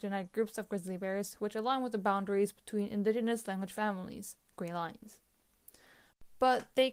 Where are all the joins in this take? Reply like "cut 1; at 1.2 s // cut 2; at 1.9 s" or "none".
none